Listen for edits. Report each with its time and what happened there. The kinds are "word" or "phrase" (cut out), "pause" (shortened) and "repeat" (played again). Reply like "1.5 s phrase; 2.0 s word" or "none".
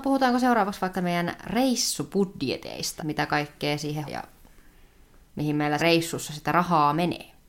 0.9 s word; 3.0 s word; 4.1 s word; 5.8 s word